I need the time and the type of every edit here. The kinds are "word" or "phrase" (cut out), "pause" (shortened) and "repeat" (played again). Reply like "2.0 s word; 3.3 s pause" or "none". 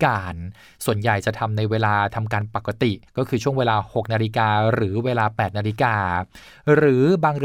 3.1 s pause